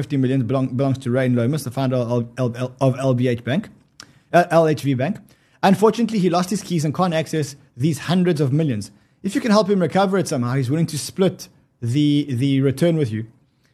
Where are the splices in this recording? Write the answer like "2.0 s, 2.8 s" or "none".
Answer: none